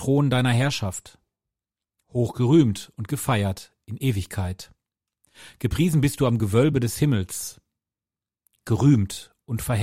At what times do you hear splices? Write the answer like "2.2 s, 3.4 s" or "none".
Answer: none